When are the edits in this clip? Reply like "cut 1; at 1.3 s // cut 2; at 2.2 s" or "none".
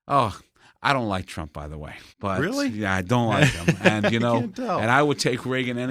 cut 1; at 2.1 s